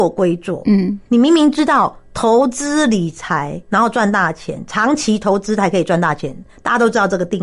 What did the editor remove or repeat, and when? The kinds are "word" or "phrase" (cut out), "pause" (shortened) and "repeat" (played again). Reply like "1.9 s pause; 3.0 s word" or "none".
1.1 s pause; 3.6 s pause